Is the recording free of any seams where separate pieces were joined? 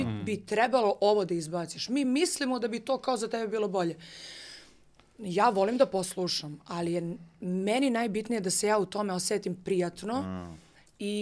yes; 0 cuts

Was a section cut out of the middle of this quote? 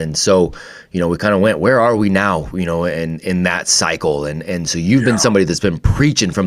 no; 0 cuts

